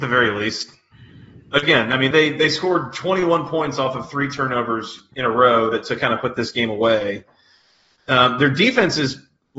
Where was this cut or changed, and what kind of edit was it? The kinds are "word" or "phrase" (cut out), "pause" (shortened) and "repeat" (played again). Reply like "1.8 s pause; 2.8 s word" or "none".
2.1 s word